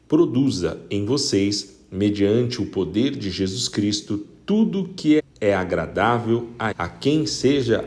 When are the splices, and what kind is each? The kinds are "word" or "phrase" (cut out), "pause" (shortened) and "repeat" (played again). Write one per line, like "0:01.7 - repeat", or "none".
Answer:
0:05.2 - word
0:06.7 - word